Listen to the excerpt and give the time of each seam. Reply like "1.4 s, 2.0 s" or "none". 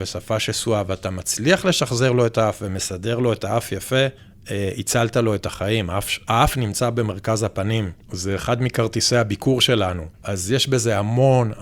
4.2 s, 8.0 s, 10.1 s